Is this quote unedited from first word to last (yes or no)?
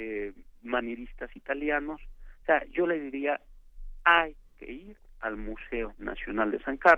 yes